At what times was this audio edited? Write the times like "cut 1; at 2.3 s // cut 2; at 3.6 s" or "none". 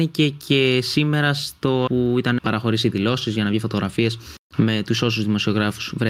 cut 1; at 1.9 s // cut 2; at 2.4 s